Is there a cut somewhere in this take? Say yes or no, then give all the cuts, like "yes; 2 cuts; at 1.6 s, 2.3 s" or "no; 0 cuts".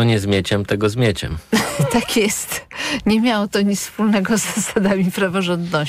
no; 0 cuts